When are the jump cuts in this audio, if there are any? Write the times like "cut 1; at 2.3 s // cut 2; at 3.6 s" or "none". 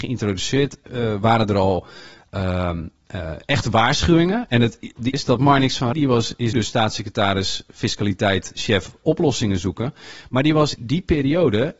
cut 1; at 5.1 s // cut 2; at 5.9 s // cut 3; at 6.5 s // cut 4; at 10.8 s